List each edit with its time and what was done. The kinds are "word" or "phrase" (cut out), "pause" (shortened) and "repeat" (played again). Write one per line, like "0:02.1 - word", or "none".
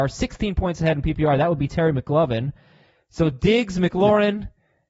none